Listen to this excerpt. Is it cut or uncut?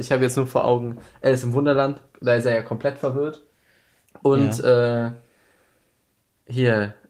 uncut